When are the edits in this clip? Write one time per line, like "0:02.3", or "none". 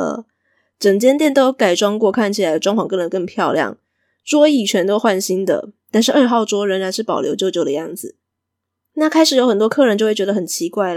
0:08.4